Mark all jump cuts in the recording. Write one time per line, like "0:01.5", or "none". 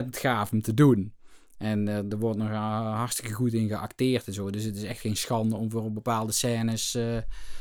none